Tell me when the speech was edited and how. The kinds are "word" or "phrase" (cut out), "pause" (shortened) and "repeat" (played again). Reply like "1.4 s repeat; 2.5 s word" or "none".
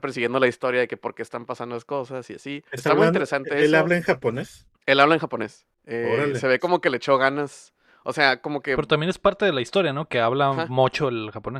2.7 s pause; 4.7 s pause; 7.9 s pause